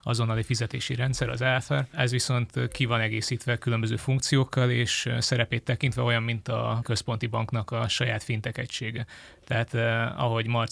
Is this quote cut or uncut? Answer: cut